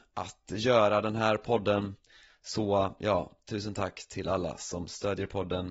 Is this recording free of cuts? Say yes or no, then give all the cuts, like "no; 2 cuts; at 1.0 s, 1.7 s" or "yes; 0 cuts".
yes; 0 cuts